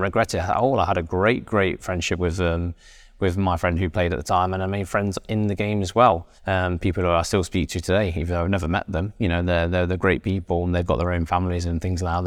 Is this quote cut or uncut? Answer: cut